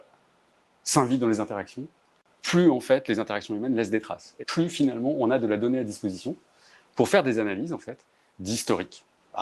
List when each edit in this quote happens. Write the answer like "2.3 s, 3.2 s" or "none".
4.4 s